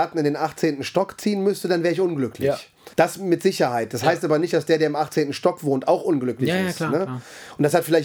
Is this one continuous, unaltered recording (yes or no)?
no